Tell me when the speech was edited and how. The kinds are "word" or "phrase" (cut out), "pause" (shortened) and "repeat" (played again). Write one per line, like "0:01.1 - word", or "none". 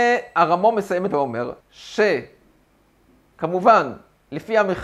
0:01.1 - word
0:01.6 - pause